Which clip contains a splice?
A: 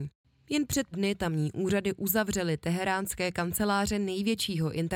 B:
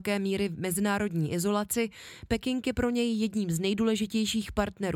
A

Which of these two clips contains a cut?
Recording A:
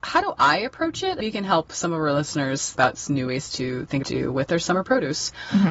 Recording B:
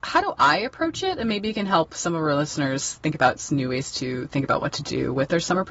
A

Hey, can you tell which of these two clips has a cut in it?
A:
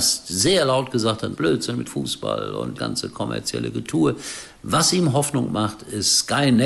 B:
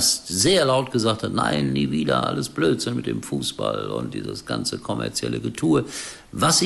A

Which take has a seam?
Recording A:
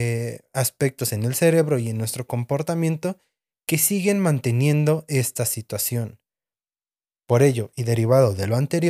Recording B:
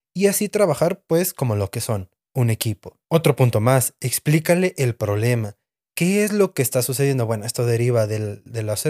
B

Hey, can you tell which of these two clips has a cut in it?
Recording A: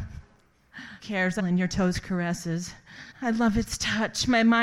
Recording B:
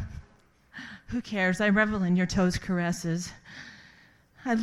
A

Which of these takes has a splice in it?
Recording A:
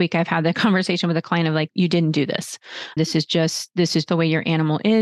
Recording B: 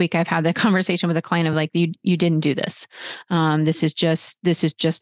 A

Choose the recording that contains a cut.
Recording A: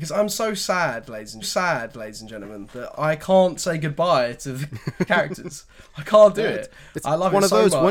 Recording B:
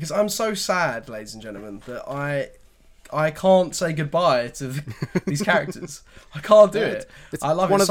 A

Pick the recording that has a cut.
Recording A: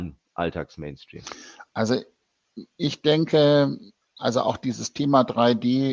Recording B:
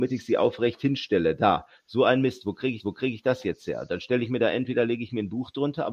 B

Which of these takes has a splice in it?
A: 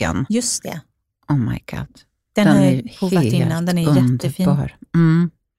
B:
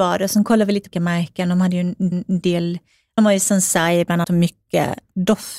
B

